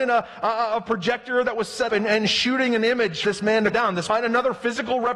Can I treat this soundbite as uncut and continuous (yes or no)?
no